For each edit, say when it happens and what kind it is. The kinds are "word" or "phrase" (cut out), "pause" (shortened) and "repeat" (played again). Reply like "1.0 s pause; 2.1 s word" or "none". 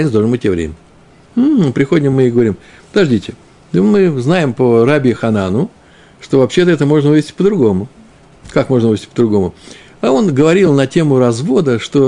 none